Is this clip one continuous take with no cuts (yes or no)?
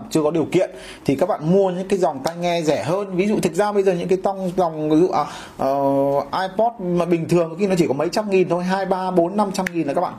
yes